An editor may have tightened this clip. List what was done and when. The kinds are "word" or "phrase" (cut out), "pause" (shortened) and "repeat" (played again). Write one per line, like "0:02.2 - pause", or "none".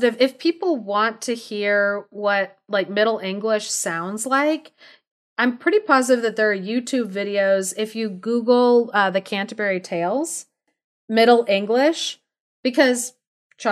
none